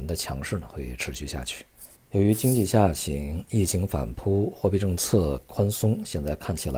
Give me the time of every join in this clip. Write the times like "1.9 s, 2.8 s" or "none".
1.9 s